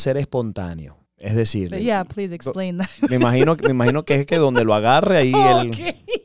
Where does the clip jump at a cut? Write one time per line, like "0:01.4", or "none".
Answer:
0:01.1